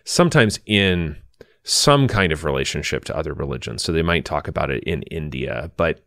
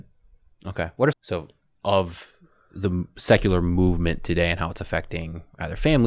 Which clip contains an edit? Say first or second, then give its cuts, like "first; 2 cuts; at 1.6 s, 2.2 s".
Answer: second; 1 cut; at 1.1 s